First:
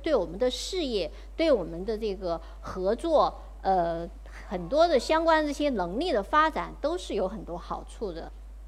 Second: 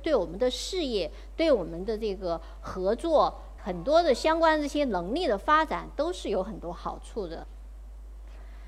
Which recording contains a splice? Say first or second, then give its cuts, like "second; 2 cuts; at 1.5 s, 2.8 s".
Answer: second; 1 cut; at 3.6 s